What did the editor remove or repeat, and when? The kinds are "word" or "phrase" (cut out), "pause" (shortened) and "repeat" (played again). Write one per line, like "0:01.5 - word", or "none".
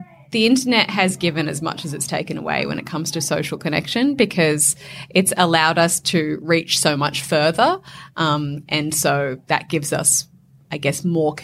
none

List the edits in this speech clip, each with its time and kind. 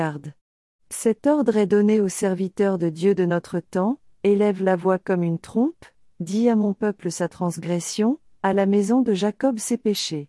none

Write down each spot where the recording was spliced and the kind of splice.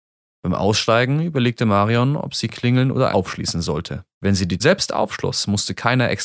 0:03.1 - word
0:04.1 - pause
0:04.6 - word

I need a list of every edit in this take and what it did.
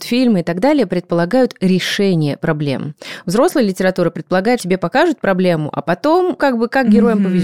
0:04.6 - word
0:06.4 - word

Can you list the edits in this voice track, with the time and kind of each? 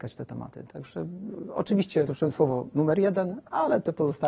0:02.1 - word

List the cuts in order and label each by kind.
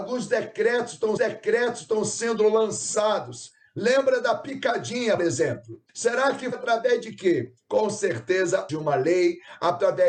0:01.2 - repeat
0:05.2 - word
0:05.9 - pause
0:06.5 - word
0:08.7 - phrase

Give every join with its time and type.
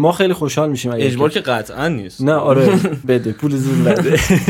0:03.0 - word

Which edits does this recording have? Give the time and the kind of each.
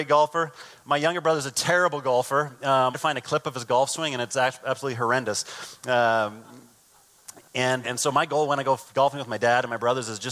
0:02.9 - phrase
0:07.8 - word
0:08.9 - pause

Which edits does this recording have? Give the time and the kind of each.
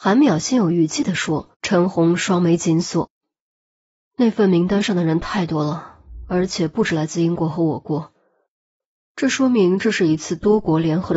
0:01.5 - pause

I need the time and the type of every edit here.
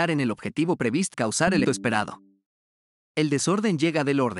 0:01.1 - word
0:01.6 - word

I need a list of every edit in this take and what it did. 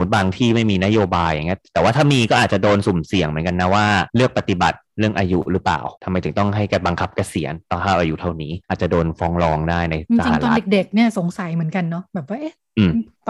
0:04.1 - pause
0:06.0 - pause
0:08.6 - pause

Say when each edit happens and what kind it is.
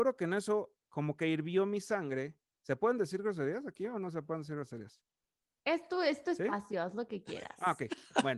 none

